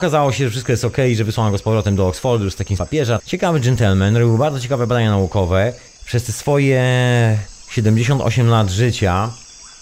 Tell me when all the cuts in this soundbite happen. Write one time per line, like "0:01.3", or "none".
0:02.8
0:03.2
0:05.9